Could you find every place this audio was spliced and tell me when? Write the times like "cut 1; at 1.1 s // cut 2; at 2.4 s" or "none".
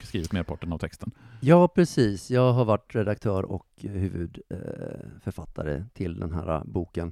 none